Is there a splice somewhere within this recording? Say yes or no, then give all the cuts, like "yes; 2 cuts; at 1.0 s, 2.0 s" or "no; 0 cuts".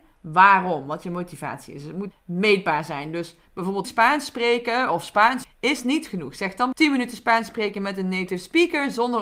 yes; 5 cuts; at 2.1 s, 3.8 s, 5.4 s, 6.1 s, 6.7 s